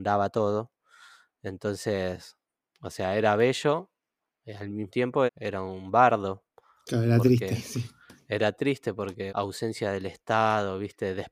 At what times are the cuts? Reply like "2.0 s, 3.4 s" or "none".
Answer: 4.9 s, 5.3 s, 9.3 s